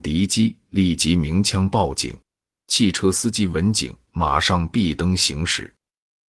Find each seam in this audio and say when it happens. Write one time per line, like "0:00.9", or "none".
none